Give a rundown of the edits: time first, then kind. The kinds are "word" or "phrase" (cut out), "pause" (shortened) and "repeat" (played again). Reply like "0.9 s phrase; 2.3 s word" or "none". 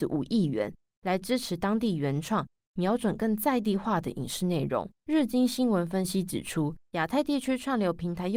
5.0 s pause; 6.8 s pause